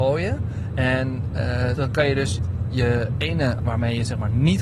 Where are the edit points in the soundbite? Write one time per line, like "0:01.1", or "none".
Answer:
0:01.8
0:03.6